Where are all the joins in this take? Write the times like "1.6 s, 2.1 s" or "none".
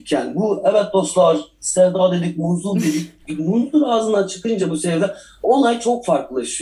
none